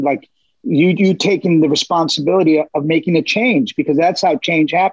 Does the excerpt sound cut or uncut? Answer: cut